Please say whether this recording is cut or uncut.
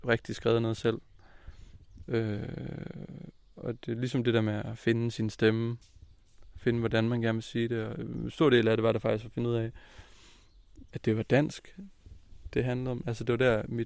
uncut